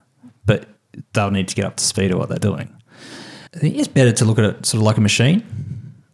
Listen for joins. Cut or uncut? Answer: cut